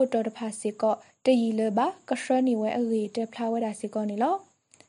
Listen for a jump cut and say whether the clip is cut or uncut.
uncut